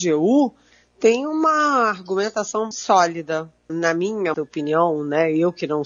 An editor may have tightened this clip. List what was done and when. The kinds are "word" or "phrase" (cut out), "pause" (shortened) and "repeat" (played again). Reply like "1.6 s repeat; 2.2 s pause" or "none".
2.7 s word; 3.7 s word; 4.3 s word